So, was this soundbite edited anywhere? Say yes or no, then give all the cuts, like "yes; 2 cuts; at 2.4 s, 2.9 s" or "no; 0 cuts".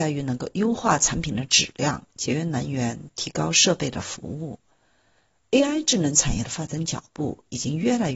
no; 0 cuts